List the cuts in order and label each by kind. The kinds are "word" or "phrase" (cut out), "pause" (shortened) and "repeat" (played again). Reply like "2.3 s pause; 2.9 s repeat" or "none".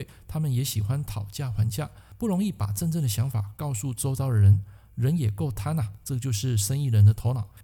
none